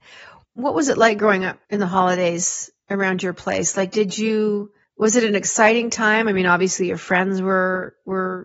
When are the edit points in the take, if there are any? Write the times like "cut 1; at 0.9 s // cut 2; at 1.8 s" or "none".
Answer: cut 1; at 1.6 s // cut 2; at 4.8 s